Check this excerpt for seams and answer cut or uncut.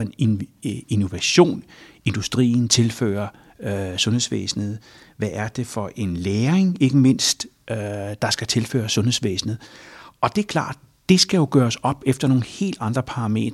uncut